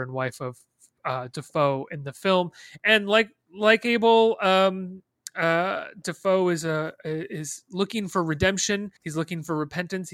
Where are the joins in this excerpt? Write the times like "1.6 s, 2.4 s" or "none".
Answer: 9.0 s